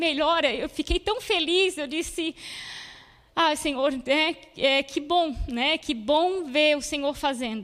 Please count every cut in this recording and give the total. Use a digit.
0